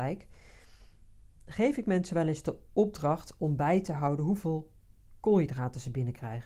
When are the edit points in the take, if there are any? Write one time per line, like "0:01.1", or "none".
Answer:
none